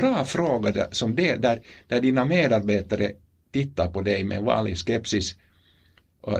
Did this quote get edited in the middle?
no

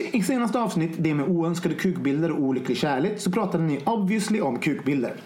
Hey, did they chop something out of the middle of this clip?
no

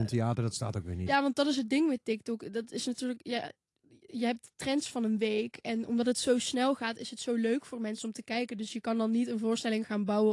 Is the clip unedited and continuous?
yes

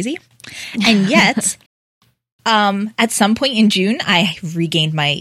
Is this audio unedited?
no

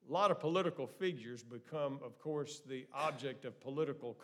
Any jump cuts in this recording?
no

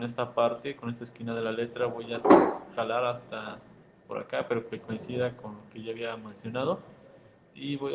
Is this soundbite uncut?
yes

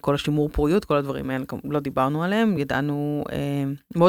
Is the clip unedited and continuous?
yes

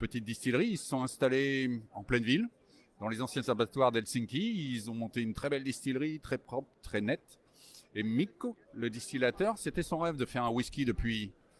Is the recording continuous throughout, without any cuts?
yes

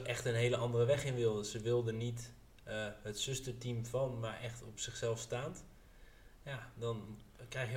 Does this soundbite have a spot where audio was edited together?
no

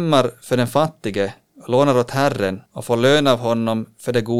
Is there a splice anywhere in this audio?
yes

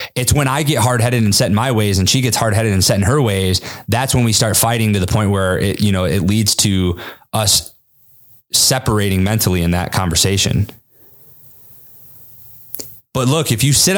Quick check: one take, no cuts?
yes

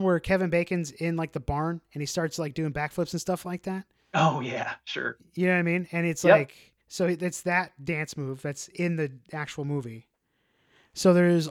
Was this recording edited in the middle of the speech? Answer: yes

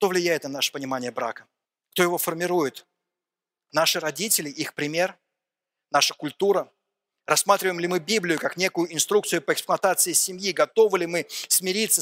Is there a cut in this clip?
yes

